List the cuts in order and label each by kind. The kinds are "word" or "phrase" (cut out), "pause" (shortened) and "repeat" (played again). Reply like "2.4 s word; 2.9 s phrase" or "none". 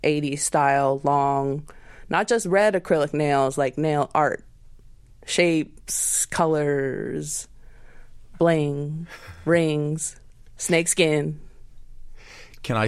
none